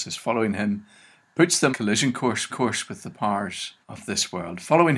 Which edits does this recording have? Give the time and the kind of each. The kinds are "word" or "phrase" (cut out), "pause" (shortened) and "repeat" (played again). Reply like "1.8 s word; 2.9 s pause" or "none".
1.7 s word; 2.5 s repeat; 3.8 s pause